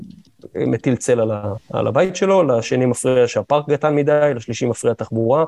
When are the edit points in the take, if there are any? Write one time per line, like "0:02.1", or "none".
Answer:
0:01.6